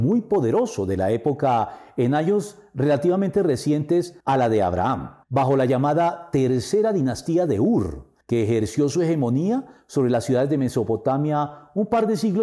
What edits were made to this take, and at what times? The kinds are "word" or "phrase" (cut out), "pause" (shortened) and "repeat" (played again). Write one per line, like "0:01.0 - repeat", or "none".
0:04.2 - pause
0:05.2 - pause
0:08.2 - pause

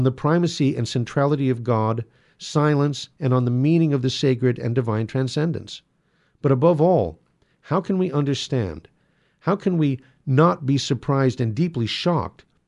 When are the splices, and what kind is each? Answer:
none

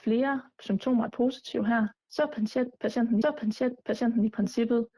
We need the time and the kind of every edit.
0:01.1 - word
0:02.0 - pause
0:03.2 - repeat

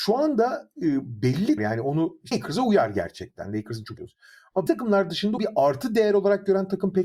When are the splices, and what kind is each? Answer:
0:01.6 - word
0:02.3 - word
0:04.0 - word
0:04.7 - word
0:05.4 - word

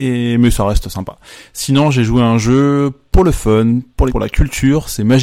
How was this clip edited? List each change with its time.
0:04.1 - word

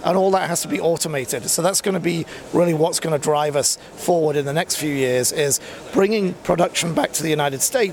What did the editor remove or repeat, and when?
none

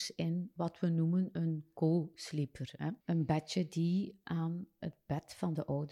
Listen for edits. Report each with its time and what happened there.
none

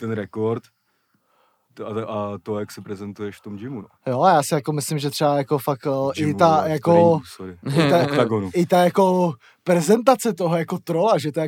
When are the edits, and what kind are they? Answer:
0:03.9 - pause

